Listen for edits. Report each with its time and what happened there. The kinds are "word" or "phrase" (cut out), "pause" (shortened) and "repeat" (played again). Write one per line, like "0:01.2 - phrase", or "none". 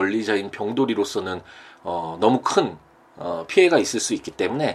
none